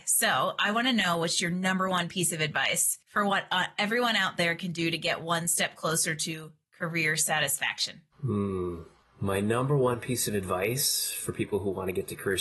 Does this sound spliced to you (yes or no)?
yes